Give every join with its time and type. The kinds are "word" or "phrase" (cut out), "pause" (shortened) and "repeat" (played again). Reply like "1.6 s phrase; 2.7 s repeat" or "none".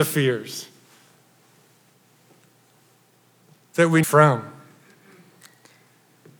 4.0 s phrase